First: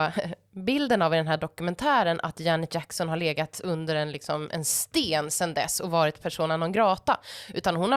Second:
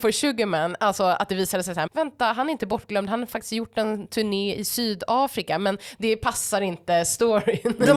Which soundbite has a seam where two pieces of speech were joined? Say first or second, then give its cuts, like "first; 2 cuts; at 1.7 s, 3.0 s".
second; 1 cut; at 1.9 s